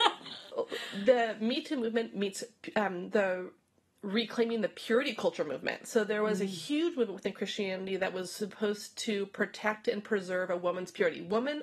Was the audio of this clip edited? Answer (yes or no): no